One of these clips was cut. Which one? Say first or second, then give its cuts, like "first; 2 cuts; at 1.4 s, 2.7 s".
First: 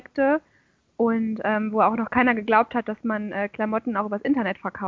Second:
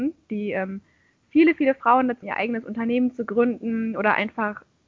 second; 1 cut; at 2.2 s